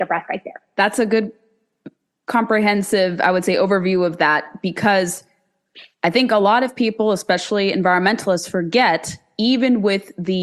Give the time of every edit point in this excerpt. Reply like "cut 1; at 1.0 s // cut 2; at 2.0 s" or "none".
none